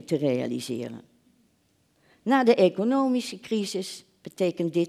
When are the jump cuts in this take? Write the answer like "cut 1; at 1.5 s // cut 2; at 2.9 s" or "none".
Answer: none